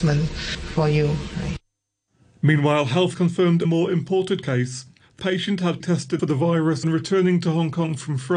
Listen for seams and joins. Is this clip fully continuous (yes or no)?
no